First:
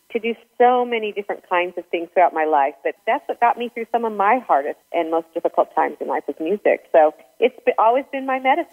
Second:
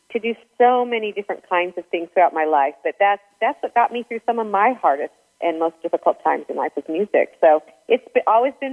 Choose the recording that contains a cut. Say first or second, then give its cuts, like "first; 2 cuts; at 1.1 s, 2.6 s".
first; 2 cuts; at 3.0 s, 4.8 s